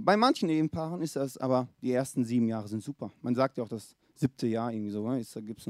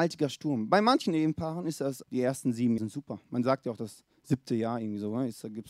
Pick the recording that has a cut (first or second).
second